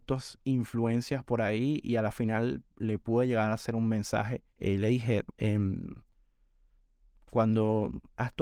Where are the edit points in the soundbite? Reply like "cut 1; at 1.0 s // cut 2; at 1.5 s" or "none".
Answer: cut 1; at 4.5 s // cut 2; at 5.3 s